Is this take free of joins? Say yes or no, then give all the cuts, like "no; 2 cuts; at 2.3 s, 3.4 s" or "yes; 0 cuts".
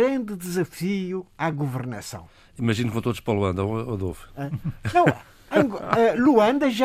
yes; 0 cuts